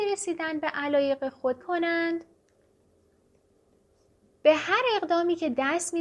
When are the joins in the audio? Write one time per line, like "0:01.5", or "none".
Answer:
0:01.6